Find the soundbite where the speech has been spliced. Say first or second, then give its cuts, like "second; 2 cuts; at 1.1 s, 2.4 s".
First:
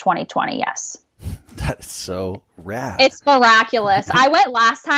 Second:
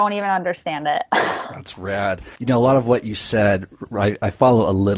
second; 1 cut; at 2.4 s